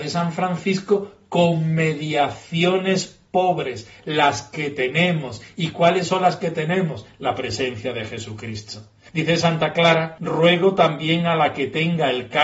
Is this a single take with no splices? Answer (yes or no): yes